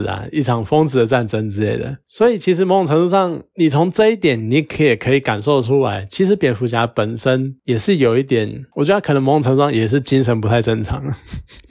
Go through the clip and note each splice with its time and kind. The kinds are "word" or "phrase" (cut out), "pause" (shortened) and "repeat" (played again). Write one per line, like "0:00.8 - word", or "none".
0:08.7 - pause